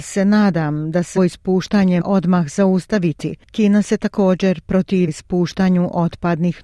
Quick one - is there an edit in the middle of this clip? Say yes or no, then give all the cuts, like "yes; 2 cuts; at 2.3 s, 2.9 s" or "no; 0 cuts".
yes; 3 cuts; at 1.2 s, 2.0 s, 5.1 s